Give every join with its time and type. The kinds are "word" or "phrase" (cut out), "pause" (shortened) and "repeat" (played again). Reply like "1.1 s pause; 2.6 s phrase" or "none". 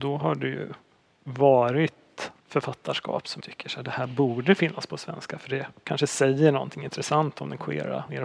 2.4 s pause; 3.4 s word